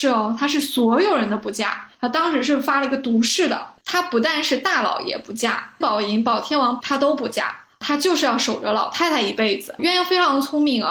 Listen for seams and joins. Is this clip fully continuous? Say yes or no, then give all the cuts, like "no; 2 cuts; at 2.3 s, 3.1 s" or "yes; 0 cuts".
no; 2 cuts; at 5.8 s, 6.8 s